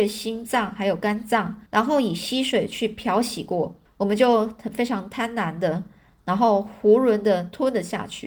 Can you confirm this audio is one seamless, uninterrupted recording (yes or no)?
no